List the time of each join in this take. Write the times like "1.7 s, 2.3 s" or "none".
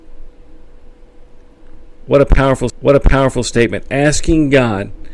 2.7 s